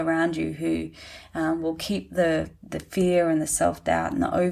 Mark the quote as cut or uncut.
uncut